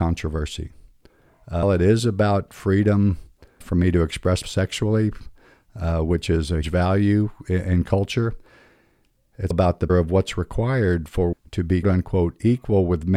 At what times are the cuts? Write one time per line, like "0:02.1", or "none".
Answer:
0:01.6
0:03.6
0:04.4
0:06.6
0:09.5
0:09.9
0:11.3
0:11.8